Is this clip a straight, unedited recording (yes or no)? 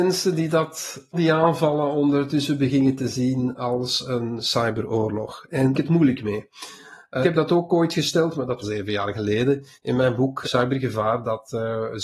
no